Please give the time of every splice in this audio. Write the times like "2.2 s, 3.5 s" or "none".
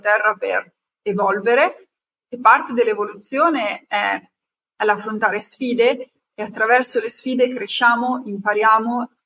none